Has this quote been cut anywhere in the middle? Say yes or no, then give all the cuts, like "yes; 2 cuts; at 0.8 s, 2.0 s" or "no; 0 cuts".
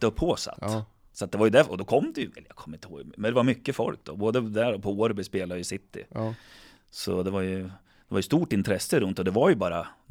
no; 0 cuts